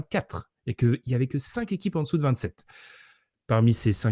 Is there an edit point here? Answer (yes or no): no